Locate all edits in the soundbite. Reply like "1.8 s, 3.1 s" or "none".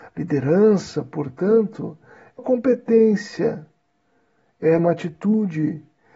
2.4 s, 4.8 s